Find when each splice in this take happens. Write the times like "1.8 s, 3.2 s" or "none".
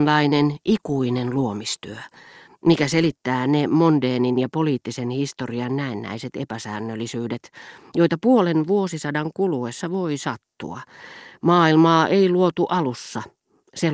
none